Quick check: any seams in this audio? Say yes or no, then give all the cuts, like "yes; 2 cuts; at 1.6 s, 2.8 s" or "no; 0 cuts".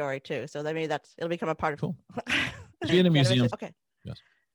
yes; 3 cuts; at 1.8 s, 2.9 s, 3.5 s